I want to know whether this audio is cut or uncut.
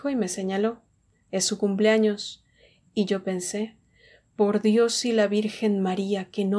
uncut